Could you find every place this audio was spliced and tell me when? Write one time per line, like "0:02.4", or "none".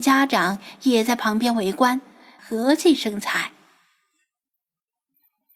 0:02.4